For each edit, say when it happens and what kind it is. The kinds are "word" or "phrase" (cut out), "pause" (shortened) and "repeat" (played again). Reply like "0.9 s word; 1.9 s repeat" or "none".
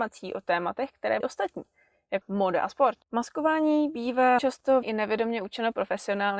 1.2 s word; 2.2 s word; 3.0 s pause; 4.4 s word; 4.8 s word